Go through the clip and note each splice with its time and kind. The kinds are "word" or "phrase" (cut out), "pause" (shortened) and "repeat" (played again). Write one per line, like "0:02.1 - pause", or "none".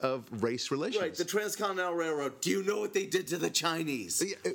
none